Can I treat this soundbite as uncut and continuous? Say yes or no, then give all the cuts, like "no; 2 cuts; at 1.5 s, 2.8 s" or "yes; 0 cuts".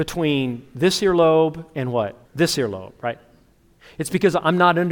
no; 1 cut; at 2.2 s